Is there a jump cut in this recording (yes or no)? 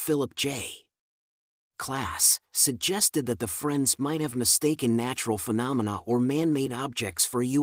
no